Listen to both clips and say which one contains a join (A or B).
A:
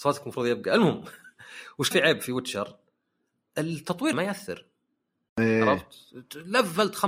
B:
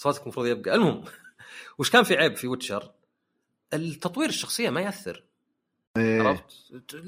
A